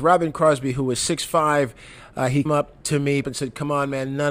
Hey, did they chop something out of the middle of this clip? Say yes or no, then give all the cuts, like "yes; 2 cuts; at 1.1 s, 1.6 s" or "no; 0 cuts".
yes; 3 cuts; at 2.5 s, 2.8 s, 3.2 s